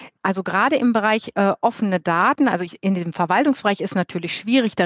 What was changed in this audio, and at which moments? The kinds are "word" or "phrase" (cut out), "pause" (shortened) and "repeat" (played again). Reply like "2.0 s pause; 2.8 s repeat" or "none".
none